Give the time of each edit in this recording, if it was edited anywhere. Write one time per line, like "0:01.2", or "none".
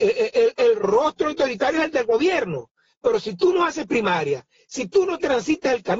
none